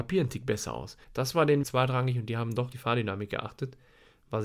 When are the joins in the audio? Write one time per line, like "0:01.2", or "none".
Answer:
0:01.0
0:01.6
0:02.7